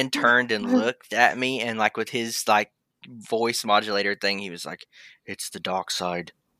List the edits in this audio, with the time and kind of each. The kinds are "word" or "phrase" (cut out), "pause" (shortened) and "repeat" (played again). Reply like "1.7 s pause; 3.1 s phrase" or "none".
none